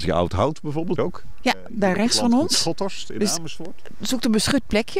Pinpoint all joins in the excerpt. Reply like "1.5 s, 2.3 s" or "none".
1.0 s